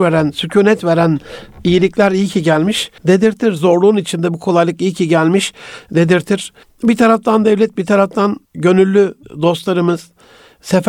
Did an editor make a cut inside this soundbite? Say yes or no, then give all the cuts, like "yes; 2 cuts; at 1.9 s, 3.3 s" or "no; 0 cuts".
yes; 3 cuts; at 3.0 s, 6.6 s, 8.4 s